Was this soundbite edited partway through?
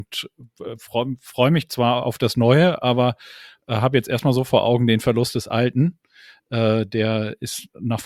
no; 0 cuts

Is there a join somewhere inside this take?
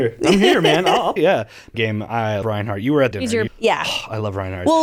yes; 5 cuts; at 1.2 s, 1.7 s, 2.4 s, 3.1 s, 3.5 s

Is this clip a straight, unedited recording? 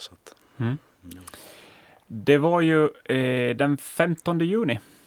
yes; 0 cuts

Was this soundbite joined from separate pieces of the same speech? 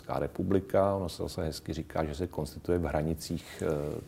no; 0 cuts

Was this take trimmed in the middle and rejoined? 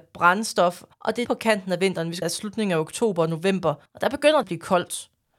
yes; 5 cuts; at 0.9 s, 1.2 s, 2.2 s, 3.9 s, 4.4 s

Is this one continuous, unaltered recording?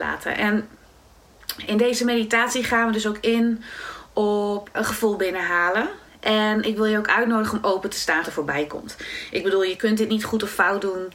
no; 3 cuts; at 4.7 s, 6.1 s, 8.2 s

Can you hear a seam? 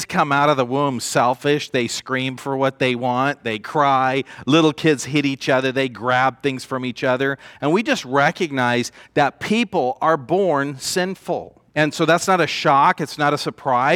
yes; 1 cut; at 11.7 s

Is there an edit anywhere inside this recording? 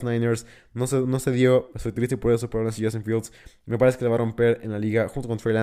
no; 0 cuts

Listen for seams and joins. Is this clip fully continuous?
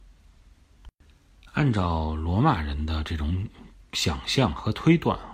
yes; 0 cuts

